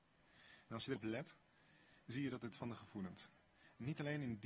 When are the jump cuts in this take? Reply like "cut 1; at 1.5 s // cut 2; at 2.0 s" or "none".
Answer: cut 1; at 1.0 s // cut 2; at 2.5 s